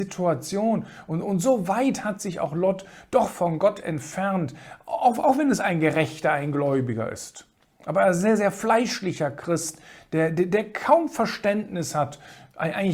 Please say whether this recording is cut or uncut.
uncut